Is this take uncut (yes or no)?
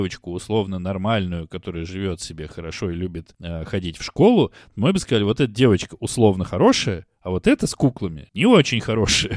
yes